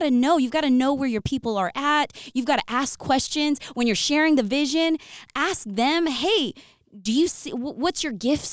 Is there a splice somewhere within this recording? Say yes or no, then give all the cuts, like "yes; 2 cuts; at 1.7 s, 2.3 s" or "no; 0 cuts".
no; 0 cuts